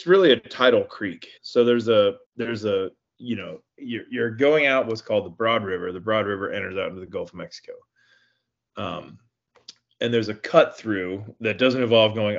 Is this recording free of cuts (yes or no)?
no